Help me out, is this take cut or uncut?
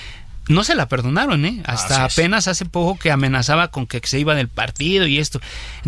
uncut